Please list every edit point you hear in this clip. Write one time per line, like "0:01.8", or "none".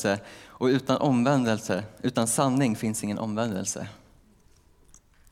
none